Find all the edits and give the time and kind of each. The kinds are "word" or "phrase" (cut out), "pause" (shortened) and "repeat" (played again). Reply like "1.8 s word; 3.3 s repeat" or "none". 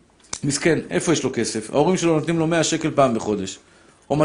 none